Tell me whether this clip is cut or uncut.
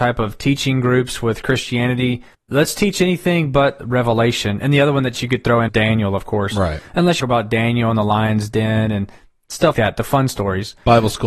cut